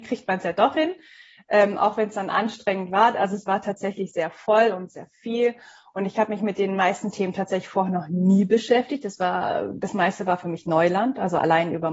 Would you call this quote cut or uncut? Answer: uncut